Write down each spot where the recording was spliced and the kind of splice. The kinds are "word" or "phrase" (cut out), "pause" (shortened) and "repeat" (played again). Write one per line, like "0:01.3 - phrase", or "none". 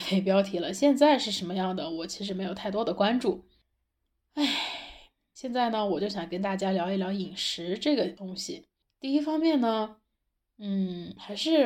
none